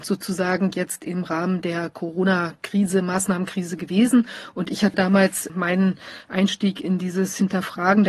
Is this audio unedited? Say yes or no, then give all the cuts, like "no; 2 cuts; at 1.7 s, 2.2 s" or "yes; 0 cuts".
no; 2 cuts; at 4.9 s, 5.5 s